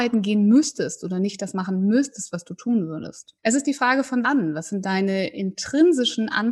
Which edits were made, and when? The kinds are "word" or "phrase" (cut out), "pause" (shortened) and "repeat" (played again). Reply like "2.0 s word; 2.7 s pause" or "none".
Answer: 3.4 s pause; 4.2 s phrase